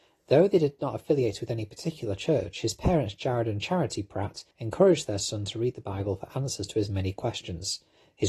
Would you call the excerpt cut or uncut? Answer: cut